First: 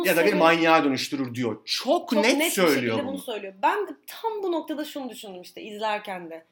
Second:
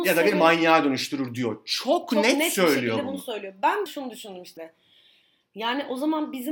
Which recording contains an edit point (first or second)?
second